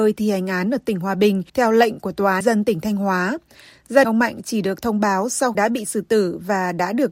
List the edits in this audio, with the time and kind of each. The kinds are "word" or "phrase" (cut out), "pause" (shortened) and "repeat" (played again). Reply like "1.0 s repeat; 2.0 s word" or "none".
1.5 s pause; 2.4 s word; 4.0 s word; 5.5 s phrase